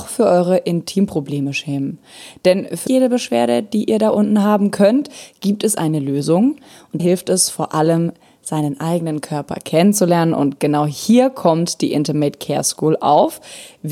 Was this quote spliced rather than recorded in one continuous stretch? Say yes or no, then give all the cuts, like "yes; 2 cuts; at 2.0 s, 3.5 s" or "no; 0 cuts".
yes; 2 cuts; at 2.9 s, 7.0 s